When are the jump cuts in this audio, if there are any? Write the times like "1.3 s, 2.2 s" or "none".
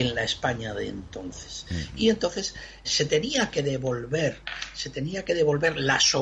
2.8 s

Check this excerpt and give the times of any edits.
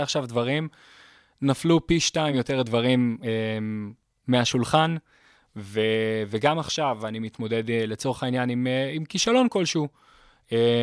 none

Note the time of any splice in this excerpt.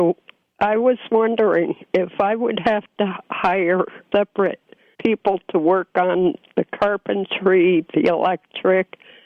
1.9 s, 4.1 s, 4.9 s

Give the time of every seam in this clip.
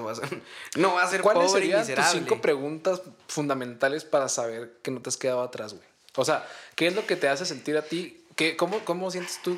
none

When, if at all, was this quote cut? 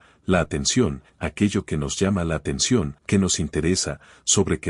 1.1 s, 3.0 s

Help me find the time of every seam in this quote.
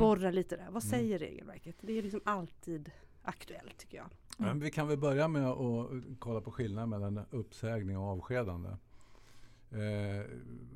none

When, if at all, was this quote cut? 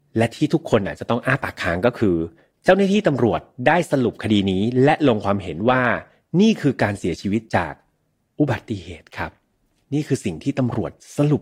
none

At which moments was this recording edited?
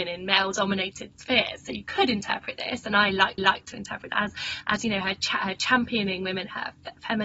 3.4 s, 4.1 s

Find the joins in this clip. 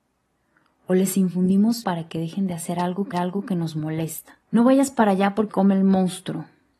1.8 s, 3.1 s, 4.4 s, 5.5 s

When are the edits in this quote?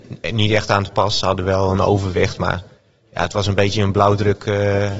none

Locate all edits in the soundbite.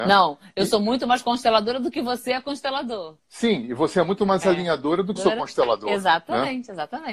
3.2 s, 5.2 s

